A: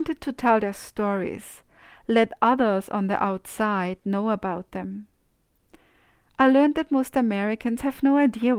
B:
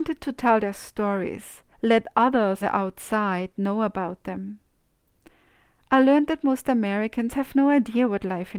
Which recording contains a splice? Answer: B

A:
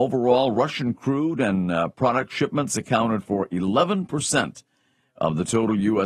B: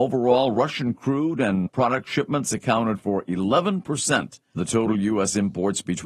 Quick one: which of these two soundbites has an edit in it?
B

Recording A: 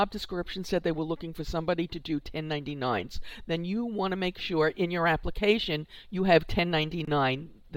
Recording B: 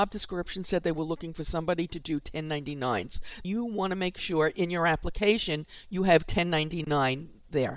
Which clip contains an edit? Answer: B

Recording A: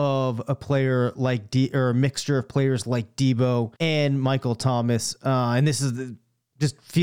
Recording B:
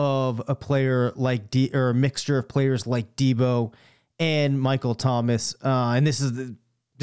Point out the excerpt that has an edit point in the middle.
A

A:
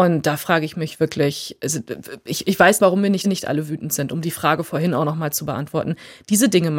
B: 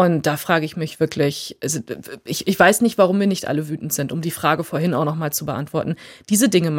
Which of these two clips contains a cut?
A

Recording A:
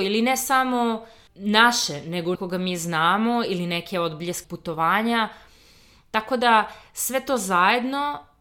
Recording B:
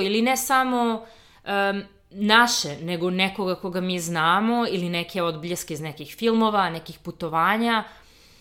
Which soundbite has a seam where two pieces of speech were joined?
A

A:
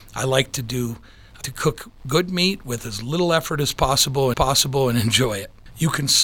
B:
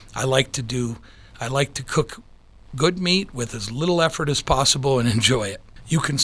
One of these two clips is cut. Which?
A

